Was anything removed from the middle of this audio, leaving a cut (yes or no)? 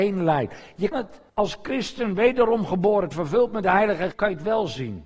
yes